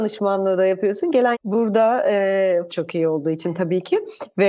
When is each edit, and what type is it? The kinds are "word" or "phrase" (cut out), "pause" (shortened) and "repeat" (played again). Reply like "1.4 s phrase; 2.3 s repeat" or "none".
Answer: 1.3 s word; 2.7 s word

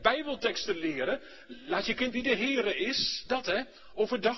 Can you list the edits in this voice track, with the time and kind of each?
2.1 s word

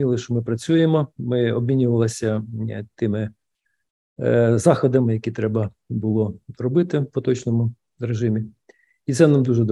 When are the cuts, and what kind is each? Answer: none

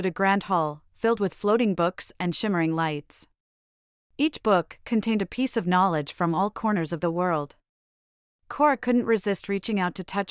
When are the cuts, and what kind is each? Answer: none

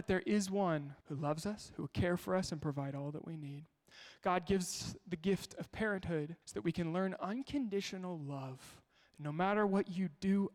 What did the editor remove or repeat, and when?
1.0 s pause; 6.4 s pause

